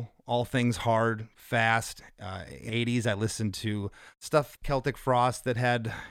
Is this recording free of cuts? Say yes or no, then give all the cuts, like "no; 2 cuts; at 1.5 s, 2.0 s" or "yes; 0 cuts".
no; 2 cuts; at 2.7 s, 4.6 s